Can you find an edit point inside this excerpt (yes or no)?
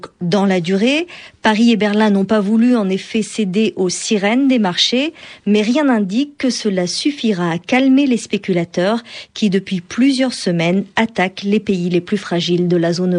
no